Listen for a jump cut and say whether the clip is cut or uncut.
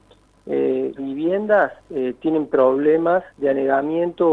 cut